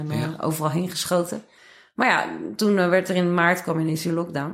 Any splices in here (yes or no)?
yes